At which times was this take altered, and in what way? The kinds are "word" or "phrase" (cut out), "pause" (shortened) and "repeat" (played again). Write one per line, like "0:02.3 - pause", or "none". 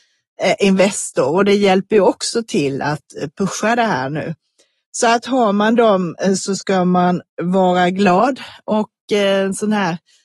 none